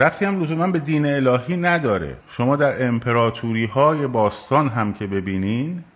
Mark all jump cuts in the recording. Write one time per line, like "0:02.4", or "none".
0:02.2